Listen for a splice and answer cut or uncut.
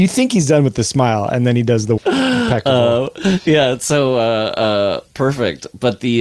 cut